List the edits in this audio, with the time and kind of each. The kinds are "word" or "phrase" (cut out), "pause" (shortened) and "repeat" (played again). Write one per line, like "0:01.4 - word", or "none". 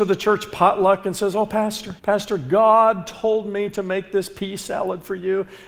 0:02.0 - pause